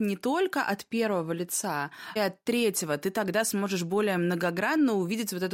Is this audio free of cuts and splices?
no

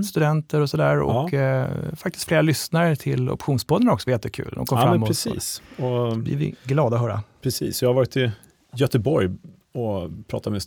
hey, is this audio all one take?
yes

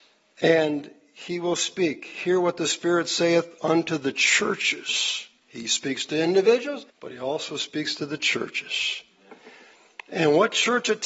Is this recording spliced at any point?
yes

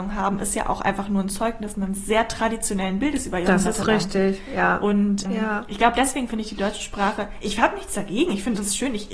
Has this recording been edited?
yes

